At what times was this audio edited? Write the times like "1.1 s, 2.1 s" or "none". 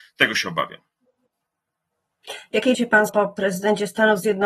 2.7 s, 3.1 s